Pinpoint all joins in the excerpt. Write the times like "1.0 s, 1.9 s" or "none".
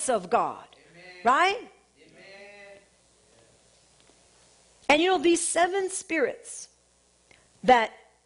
none